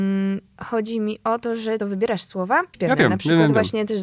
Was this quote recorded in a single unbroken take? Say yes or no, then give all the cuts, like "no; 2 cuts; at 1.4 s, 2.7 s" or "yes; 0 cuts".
no; 2 cuts; at 1.8 s, 2.7 s